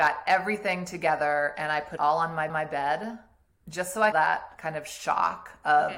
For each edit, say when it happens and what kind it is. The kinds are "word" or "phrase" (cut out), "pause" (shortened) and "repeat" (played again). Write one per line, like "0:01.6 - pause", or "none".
0:02.0 - word
0:02.5 - repeat
0:04.1 - phrase